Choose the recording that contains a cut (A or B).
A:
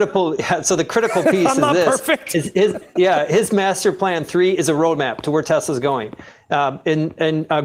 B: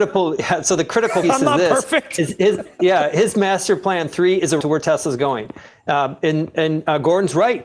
B